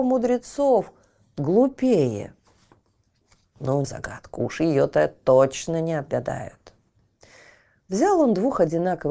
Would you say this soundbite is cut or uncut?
cut